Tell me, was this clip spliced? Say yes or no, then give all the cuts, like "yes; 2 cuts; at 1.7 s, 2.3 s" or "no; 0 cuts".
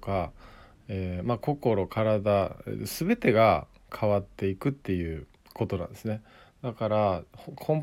no; 0 cuts